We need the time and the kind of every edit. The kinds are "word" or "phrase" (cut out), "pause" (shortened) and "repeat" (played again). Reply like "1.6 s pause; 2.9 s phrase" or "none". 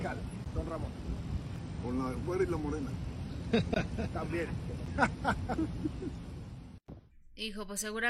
none